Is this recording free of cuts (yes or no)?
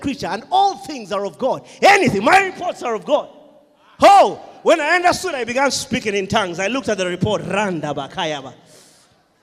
yes